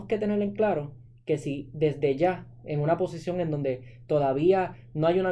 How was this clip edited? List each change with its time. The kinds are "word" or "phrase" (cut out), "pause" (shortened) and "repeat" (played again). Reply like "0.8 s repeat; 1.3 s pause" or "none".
none